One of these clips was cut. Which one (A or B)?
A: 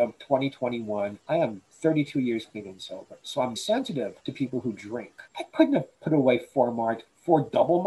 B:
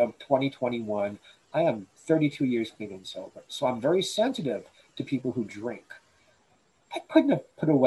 A